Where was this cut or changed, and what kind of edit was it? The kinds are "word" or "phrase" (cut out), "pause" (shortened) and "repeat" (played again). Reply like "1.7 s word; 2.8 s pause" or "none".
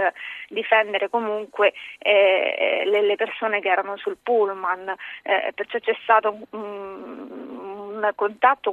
none